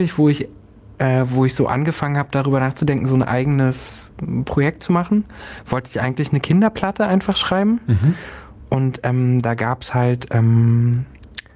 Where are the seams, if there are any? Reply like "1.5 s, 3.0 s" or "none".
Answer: none